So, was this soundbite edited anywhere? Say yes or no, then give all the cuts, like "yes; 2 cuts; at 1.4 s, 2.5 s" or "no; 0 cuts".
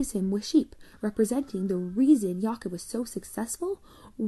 no; 0 cuts